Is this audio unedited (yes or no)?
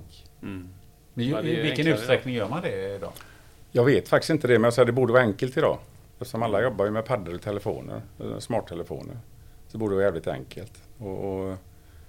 no